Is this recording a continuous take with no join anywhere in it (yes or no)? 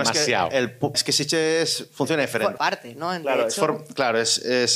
no